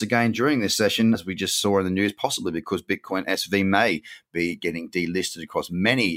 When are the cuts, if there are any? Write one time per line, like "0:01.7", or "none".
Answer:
0:01.1

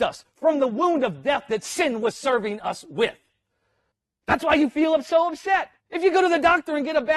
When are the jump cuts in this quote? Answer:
0:03.9
0:05.8

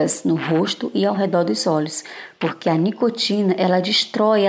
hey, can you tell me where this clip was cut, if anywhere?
none

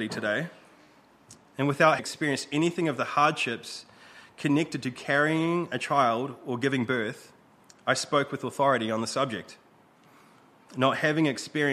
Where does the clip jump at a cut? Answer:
0:02.0

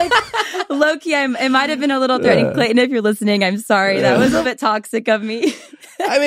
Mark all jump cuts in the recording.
0:04.4

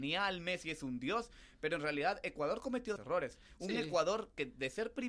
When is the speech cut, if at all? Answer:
0:03.0

